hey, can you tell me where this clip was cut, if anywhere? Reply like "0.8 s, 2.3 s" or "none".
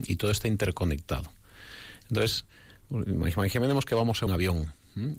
4.3 s